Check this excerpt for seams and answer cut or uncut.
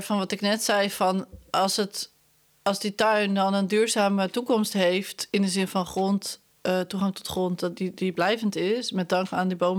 uncut